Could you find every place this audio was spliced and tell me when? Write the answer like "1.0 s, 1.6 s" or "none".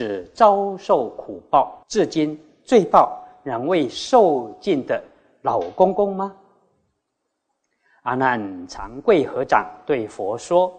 1.8 s